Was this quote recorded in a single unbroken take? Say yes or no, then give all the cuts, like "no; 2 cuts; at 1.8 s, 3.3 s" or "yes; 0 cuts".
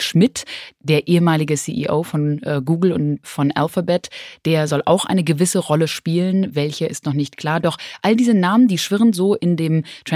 no; 1 cut; at 3.2 s